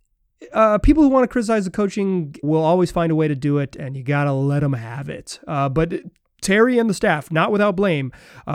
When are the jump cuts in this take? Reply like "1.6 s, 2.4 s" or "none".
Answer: 2.4 s